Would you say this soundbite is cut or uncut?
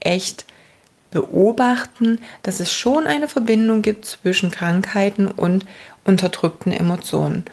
uncut